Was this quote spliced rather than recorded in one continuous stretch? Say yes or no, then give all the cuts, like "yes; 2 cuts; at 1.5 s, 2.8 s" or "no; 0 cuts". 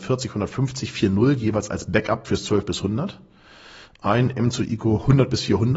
no; 0 cuts